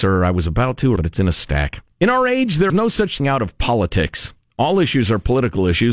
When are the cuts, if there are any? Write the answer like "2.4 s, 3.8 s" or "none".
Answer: 1.0 s, 1.9 s, 2.7 s, 3.2 s